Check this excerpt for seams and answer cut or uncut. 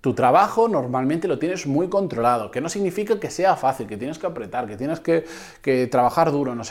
uncut